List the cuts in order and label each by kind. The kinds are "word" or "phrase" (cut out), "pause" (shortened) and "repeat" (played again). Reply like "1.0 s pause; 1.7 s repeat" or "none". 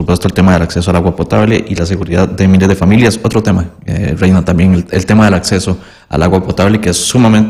none